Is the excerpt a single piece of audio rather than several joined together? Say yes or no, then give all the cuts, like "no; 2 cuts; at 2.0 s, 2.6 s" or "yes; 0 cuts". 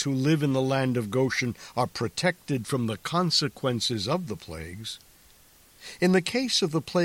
yes; 0 cuts